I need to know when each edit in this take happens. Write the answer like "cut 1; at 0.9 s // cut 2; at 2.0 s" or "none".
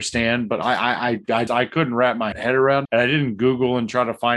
cut 1; at 1.5 s // cut 2; at 2.3 s // cut 3; at 2.8 s